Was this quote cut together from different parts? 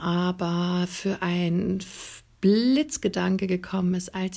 no; 0 cuts

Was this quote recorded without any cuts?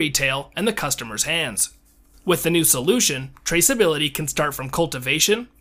yes; 0 cuts

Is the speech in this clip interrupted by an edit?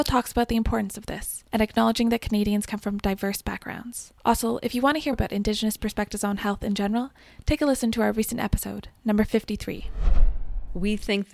yes; 3 cuts; at 1.5 s, 4.2 s, 5.1 s

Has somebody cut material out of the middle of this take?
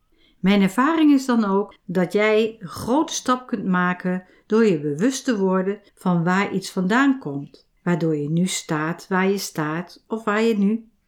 yes; 2 cuts; at 5.9 s, 7.8 s

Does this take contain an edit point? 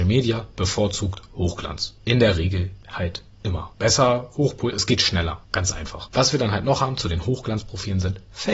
yes; 1 cut; at 4.7 s

